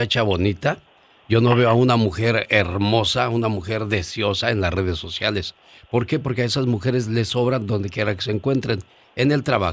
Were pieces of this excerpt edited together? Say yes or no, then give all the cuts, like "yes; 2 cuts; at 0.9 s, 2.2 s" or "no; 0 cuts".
no; 0 cuts